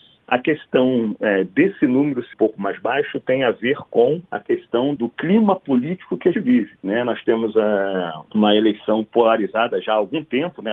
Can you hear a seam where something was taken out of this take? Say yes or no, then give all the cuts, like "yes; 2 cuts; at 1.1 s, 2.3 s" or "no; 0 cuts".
yes; 3 cuts; at 2.3 s, 5.0 s, 6.3 s